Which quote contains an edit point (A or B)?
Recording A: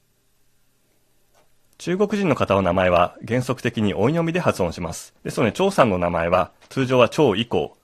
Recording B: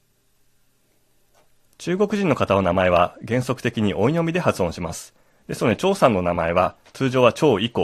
A